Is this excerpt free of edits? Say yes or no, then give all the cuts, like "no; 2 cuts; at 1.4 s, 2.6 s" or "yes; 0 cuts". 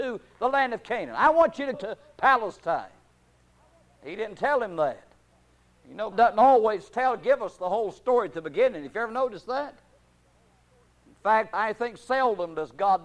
no; 3 cuts; at 1.7 s, 6.1 s, 11.5 s